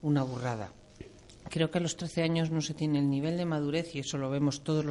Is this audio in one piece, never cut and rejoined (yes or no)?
yes